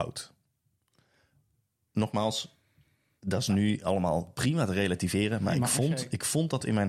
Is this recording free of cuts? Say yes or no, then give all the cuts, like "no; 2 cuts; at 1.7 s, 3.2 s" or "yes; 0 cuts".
yes; 0 cuts